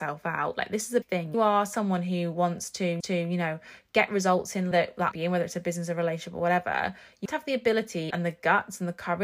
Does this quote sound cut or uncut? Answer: cut